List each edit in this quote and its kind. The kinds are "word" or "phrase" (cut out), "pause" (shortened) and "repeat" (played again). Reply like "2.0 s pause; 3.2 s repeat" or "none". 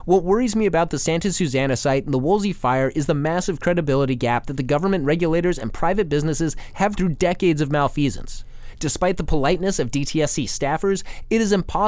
7.0 s word